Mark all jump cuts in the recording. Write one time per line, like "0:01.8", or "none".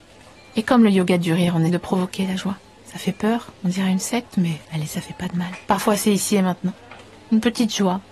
0:01.7
0:04.6
0:05.6